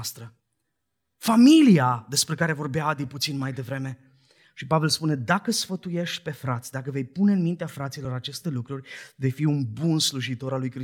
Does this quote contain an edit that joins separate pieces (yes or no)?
no